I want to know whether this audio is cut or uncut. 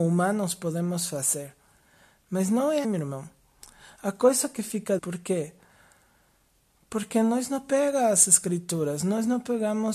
cut